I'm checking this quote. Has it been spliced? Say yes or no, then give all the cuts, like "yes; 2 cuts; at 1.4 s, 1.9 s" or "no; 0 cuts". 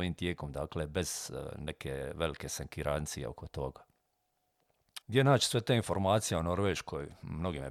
yes; 1 cut; at 5.0 s